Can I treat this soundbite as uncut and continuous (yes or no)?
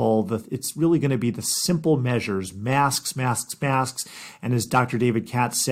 yes